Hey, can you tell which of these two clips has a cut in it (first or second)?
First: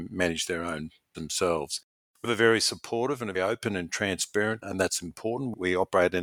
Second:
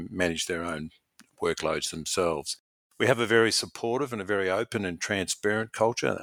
first